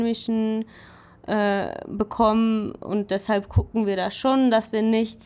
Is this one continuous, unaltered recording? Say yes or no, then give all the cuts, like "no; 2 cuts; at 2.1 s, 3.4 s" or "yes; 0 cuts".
yes; 0 cuts